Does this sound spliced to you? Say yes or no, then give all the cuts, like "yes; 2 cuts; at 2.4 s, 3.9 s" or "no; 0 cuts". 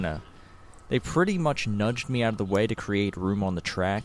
no; 0 cuts